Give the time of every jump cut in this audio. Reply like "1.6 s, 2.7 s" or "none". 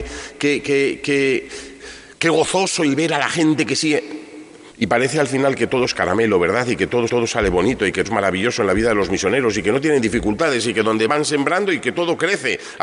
4.7 s, 7.1 s, 8.0 s, 11.1 s